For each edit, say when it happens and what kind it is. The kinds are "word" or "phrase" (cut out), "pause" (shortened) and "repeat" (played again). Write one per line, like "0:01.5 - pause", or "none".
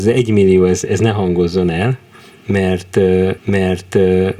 0:03.4 - repeat